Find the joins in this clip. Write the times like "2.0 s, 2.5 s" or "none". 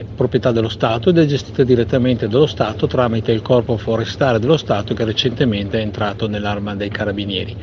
none